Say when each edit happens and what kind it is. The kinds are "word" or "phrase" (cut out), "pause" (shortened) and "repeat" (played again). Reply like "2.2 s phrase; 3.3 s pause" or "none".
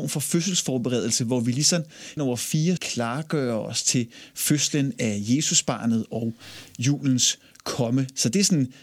2.2 s word; 2.8 s word